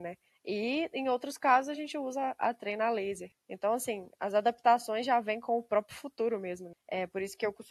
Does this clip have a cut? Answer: no; 0 cuts

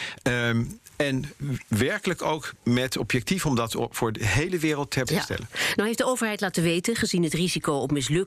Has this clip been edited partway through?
yes; 1 cut; at 5.0 s

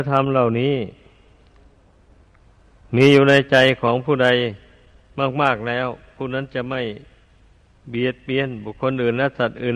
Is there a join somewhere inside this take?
no; 0 cuts

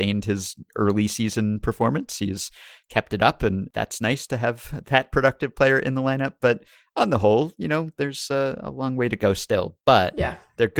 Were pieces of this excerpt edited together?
no; 0 cuts

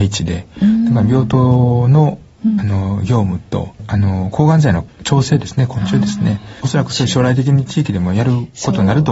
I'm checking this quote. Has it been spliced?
yes; 1 cut; at 6.6 s

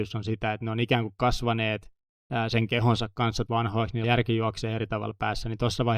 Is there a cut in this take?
yes; 2 cuts; at 3.5 s, 4.0 s

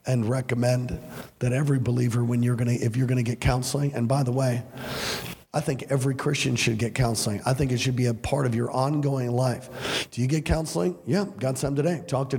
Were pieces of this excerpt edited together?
no; 0 cuts

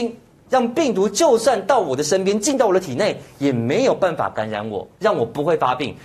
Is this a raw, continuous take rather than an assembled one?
no; 1 cut; at 4.9 s

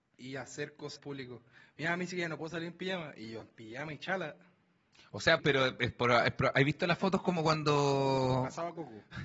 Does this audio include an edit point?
yes; 3 cuts; at 1.0 s, 3.4 s, 5.4 s

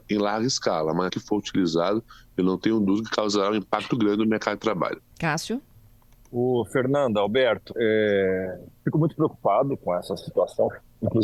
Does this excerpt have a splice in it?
yes; 4 cuts; at 1.1 s, 3.9 s, 5.1 s, 7.7 s

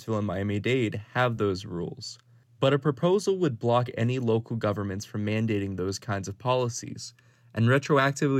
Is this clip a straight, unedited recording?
yes; 0 cuts

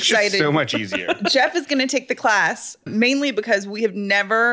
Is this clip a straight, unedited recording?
no; 1 cut; at 2.9 s

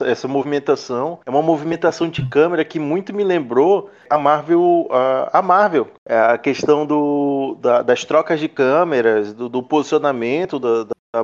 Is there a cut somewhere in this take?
yes; 2 cuts; at 1.2 s, 6.0 s

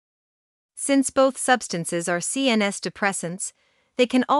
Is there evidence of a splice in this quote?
no; 0 cuts

